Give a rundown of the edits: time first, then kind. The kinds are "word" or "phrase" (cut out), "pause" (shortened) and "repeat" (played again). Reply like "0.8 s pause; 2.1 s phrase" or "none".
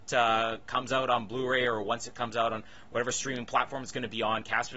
none